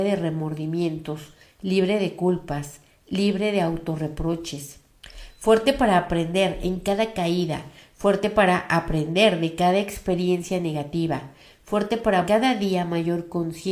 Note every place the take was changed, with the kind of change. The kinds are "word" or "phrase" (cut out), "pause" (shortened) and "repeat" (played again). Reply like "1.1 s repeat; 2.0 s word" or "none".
12.2 s word

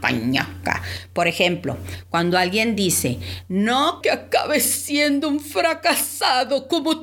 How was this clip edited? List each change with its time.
4.0 s word

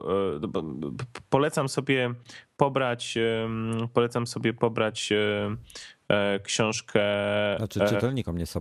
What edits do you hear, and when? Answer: none

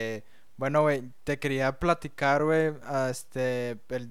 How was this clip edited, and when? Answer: none

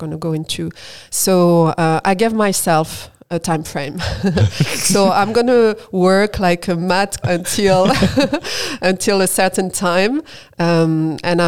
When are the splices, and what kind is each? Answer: 7.2 s word

